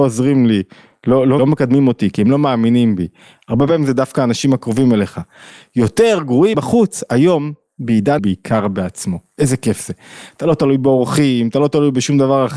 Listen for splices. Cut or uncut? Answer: cut